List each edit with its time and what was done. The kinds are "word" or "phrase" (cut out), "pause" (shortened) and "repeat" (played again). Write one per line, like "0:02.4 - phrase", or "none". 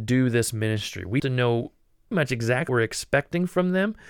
0:01.2 - word
0:02.1 - word
0:02.7 - word

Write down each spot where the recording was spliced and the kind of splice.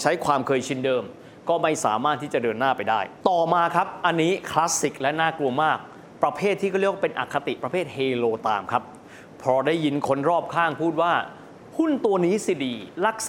0:03.2 - pause

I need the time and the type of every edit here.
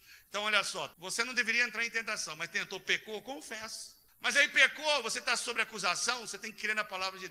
0:00.9 - pause
0:04.1 - pause

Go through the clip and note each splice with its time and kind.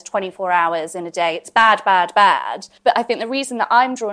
0:02.8 - pause

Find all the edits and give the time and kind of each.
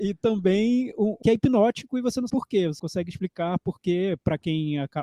0:01.2 - phrase
0:02.3 - word
0:02.8 - word

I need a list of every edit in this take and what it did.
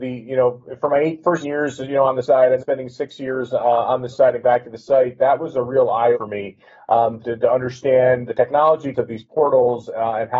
0:01.4 - word
0:02.2 - word
0:02.6 - word
0:04.1 - word
0:04.4 - word
0:06.1 - word
0:07.2 - word
0:08.3 - word
0:08.9 - word

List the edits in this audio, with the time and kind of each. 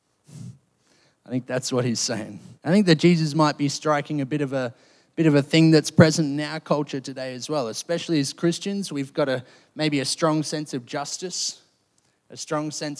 0:02.6 - pause

